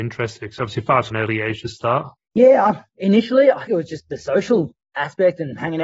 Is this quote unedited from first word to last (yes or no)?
no